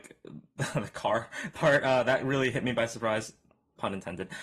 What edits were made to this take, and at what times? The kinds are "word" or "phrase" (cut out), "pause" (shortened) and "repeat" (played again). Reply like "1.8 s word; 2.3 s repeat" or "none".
none